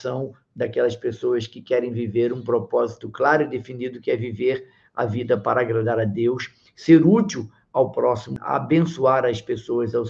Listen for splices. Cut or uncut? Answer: uncut